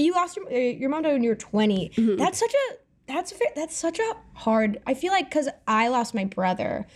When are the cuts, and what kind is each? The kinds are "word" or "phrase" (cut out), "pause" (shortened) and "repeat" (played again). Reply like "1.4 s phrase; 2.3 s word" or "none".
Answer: none